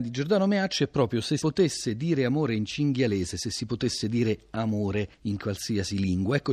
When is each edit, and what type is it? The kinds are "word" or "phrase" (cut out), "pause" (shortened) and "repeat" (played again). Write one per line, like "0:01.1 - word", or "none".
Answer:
0:01.4 - word